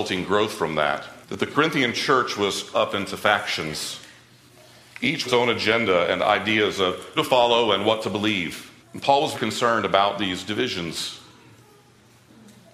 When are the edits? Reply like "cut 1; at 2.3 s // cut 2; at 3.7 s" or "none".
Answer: cut 1; at 1.2 s // cut 2; at 2.7 s // cut 3; at 5.2 s // cut 4; at 7.2 s // cut 5; at 8.8 s // cut 6; at 9.3 s